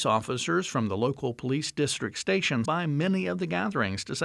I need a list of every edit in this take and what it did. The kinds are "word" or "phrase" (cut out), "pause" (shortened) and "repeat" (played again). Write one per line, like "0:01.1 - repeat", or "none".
0:02.6 - word